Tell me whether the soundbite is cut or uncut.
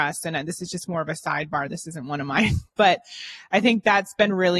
uncut